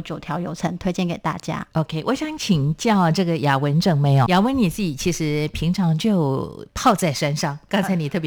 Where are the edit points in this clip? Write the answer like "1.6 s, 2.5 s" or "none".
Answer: 4.3 s